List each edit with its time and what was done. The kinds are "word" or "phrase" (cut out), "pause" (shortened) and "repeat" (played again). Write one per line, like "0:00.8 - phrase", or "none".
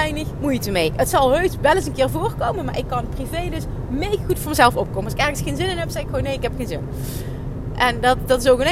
none